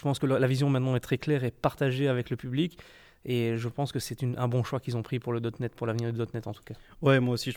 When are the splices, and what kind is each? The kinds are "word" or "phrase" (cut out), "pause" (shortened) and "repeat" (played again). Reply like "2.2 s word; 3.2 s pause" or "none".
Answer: none